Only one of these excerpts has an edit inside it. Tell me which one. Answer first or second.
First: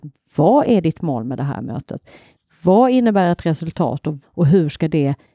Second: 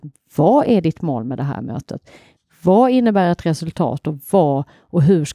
first